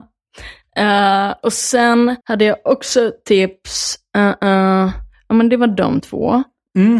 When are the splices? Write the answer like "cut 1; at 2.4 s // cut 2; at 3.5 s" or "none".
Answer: cut 1; at 2.2 s